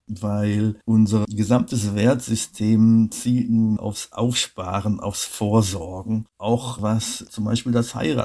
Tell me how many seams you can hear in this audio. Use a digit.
1